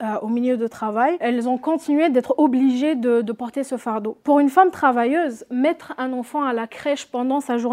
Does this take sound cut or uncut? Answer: cut